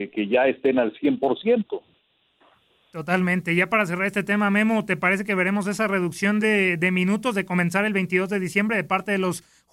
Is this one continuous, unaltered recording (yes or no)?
yes